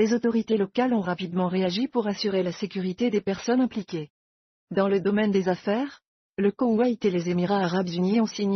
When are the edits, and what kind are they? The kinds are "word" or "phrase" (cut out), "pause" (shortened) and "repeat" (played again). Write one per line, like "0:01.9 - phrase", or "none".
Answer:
none